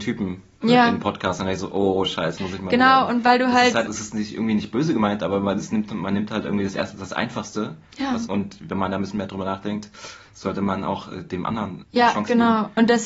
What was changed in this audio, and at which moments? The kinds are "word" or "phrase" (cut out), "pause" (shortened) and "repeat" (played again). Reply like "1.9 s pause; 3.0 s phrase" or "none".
2.4 s word; 3.9 s word; 8.3 s word; 11.8 s word